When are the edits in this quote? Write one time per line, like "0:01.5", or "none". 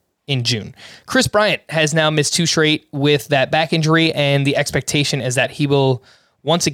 none